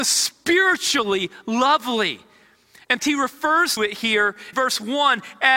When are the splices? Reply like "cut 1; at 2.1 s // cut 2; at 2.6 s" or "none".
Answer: cut 1; at 3.0 s // cut 2; at 3.8 s // cut 3; at 4.5 s